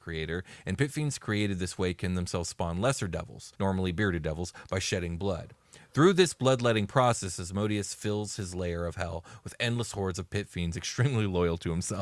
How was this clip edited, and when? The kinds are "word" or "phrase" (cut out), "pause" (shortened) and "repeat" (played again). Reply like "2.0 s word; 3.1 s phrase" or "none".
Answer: 3.5 s pause